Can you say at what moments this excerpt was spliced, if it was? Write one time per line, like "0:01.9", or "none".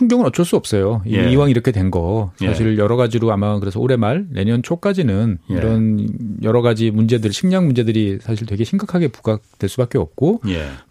none